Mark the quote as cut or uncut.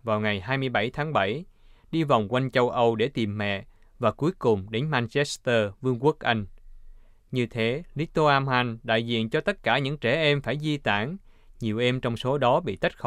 uncut